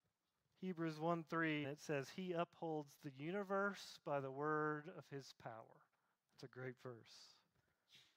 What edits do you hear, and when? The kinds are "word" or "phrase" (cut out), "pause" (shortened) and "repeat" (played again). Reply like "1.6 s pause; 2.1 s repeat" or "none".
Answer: 1.6 s word; 5.9 s pause